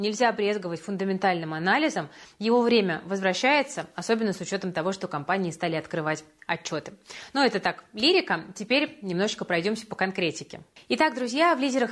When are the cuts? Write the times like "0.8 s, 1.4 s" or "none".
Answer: none